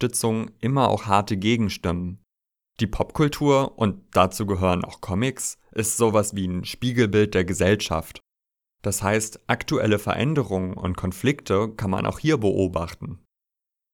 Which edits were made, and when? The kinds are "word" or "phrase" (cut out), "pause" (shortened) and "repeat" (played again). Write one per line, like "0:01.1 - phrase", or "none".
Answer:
none